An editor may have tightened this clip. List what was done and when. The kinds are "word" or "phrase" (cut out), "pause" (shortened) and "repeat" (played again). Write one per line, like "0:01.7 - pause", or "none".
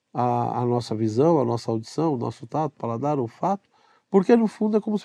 none

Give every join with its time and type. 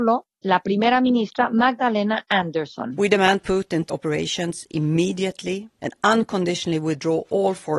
0:03.4 - word
0:03.9 - phrase

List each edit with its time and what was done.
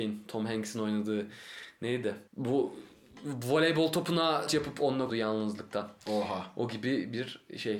0:02.3 - pause
0:04.5 - word
0:05.1 - word

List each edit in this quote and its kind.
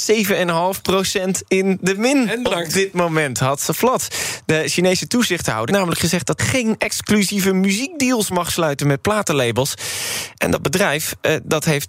0:05.7 - word
0:06.4 - word
0:08.3 - word

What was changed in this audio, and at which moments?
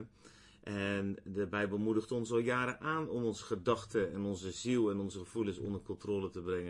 none

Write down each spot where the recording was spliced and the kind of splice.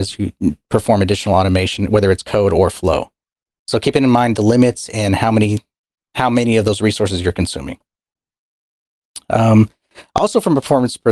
none

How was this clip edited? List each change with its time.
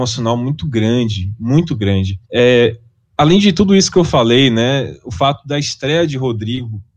0:02.2 - pause

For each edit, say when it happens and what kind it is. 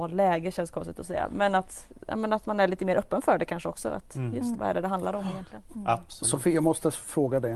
0:04.5 - word

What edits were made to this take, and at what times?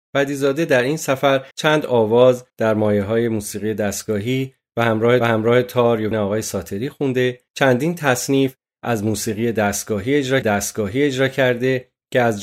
0:01.5 - pause
0:02.5 - pause
0:05.2 - repeat
0:06.1 - word
0:07.5 - pause
0:10.4 - repeat

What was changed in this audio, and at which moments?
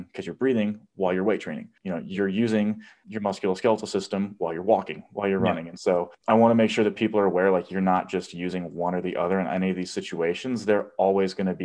0:06.1 - pause

